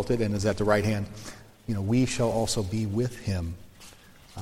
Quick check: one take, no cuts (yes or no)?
yes